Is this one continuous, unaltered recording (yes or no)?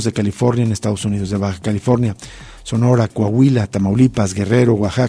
yes